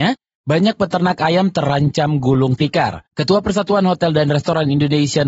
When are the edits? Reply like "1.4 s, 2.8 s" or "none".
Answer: 3.1 s